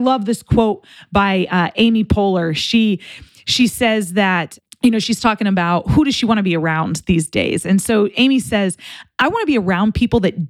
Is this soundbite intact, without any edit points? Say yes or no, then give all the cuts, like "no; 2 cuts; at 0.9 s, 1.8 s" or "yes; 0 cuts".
yes; 0 cuts